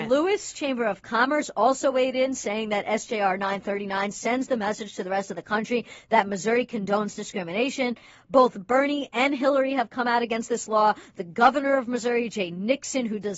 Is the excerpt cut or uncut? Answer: uncut